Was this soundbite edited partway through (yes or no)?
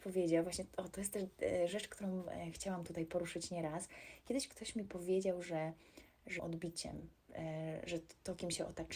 yes